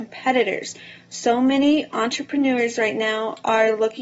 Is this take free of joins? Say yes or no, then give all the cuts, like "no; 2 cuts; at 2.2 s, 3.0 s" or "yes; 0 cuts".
yes; 0 cuts